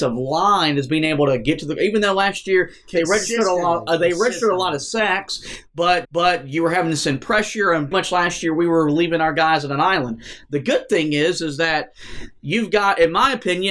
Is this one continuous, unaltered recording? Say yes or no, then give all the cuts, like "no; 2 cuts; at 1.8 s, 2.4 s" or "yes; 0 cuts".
no; 2 cuts; at 6.0 s, 7.9 s